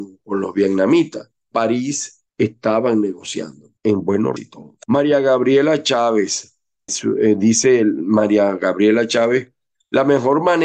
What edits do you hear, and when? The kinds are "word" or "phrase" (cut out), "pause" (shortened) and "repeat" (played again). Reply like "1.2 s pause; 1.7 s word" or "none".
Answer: 1.5 s word; 2.3 s pause; 3.8 s pause; 4.4 s word; 4.8 s pause; 6.9 s word

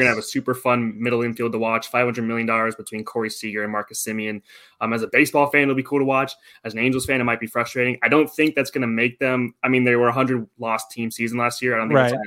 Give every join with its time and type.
none

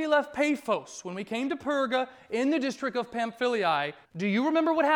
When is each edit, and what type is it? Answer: 4.0 s pause

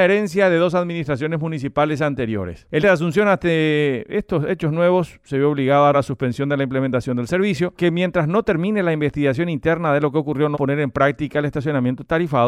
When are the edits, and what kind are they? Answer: 2.8 s word; 5.9 s word; 7.8 s word; 10.5 s word

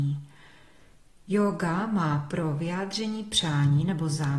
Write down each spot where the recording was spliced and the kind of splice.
none

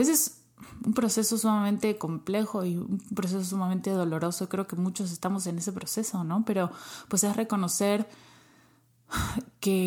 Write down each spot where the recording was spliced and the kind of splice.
none

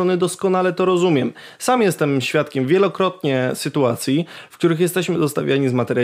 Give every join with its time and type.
none

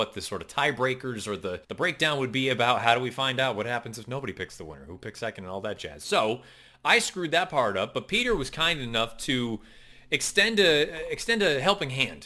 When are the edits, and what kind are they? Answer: 1.6 s pause

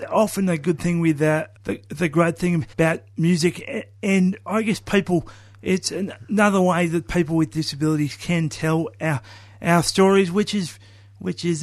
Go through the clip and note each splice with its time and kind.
1.6 s pause; 2.7 s pause

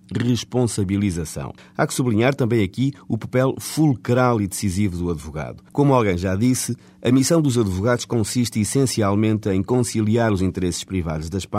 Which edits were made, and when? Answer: 1.6 s pause; 5.7 s pause

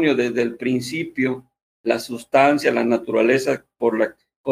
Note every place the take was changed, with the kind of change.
none

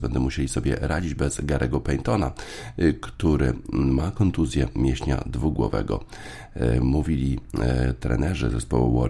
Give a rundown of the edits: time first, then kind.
none

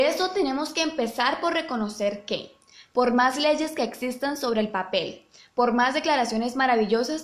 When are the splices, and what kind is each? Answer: none

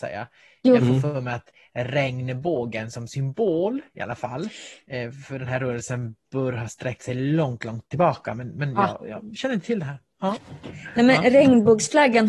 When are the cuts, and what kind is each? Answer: none

